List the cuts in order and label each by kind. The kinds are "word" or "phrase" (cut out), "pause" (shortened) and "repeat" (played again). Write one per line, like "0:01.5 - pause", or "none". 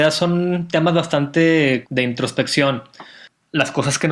0:01.8 - word